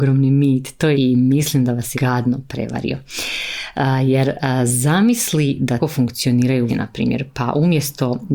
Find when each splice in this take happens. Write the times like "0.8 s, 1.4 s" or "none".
0.9 s, 1.9 s, 5.8 s, 6.7 s